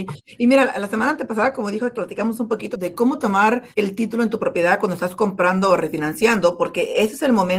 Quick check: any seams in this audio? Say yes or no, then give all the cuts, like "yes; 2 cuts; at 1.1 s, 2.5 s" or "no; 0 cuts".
yes; 3 cuts; at 1.9 s, 2.7 s, 3.7 s